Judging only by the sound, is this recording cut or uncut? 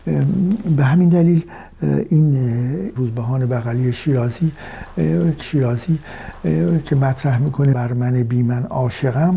cut